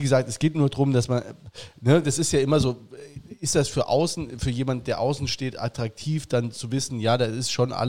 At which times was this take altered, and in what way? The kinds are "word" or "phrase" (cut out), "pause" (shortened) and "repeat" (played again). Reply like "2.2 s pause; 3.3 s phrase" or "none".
none